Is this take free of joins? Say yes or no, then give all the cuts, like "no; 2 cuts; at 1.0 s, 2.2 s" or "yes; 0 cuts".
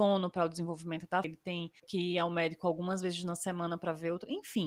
no; 2 cuts; at 1.2 s, 1.8 s